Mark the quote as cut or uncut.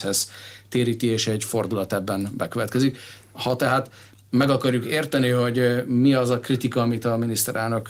uncut